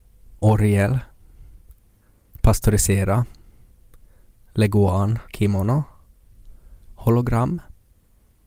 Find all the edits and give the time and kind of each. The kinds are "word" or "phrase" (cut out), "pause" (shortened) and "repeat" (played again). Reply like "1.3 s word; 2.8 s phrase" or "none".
5.2 s pause